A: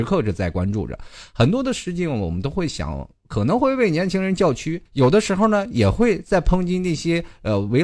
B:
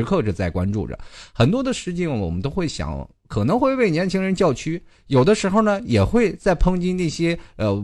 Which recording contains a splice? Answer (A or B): A